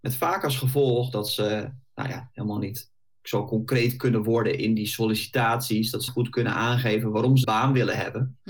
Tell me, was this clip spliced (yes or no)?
yes